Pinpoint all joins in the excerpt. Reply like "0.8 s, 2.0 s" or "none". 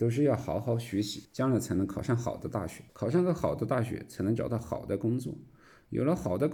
1.2 s, 2.9 s